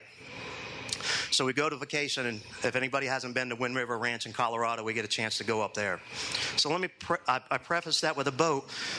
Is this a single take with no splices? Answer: yes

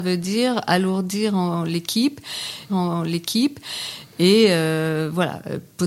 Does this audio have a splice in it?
yes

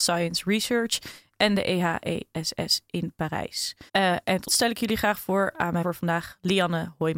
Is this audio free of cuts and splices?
no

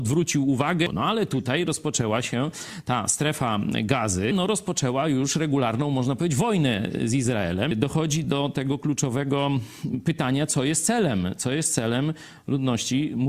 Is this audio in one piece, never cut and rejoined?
yes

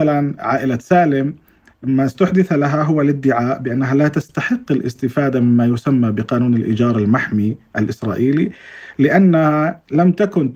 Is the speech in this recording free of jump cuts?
yes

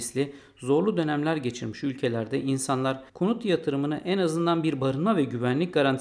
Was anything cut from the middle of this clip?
yes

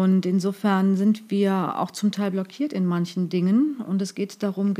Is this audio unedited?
yes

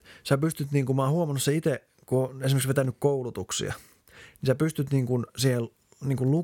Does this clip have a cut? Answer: no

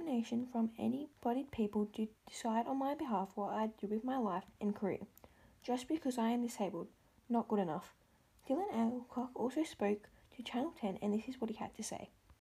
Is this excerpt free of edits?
no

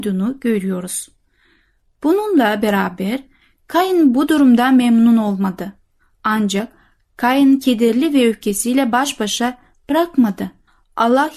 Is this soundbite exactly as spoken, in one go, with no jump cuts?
yes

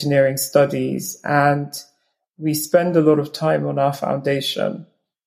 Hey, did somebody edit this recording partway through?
no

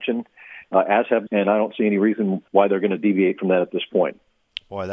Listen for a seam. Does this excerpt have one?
yes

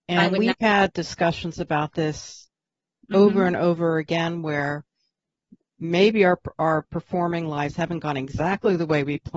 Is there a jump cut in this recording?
no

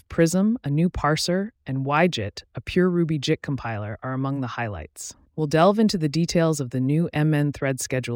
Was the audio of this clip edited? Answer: yes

